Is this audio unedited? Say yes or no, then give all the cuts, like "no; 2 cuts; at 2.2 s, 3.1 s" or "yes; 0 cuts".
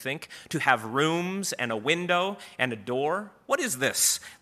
yes; 0 cuts